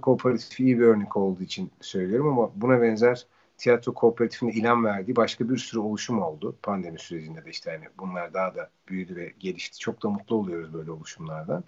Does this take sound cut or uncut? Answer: uncut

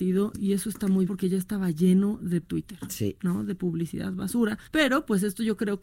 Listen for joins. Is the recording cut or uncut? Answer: cut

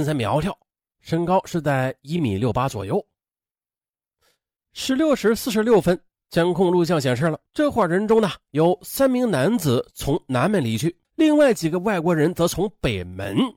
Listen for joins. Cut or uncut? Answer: cut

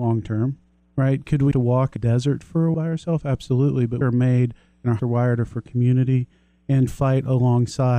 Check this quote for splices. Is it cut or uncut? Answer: cut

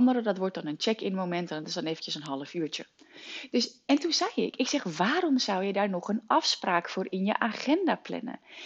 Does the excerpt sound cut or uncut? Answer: uncut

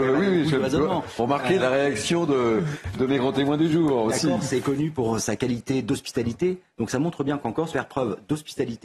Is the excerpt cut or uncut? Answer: cut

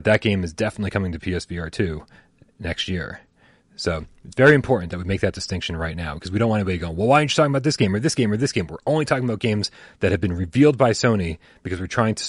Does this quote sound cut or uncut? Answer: uncut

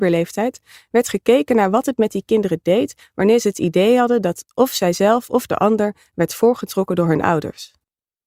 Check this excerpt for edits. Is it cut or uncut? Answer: uncut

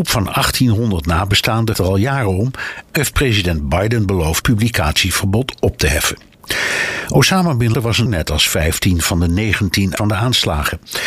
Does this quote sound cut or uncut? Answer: cut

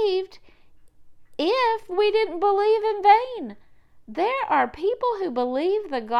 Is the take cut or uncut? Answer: uncut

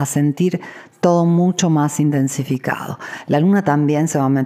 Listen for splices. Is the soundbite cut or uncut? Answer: uncut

